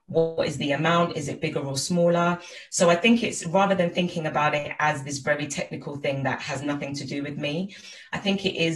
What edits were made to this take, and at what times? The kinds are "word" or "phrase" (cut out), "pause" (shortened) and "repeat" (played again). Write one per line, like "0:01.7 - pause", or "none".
none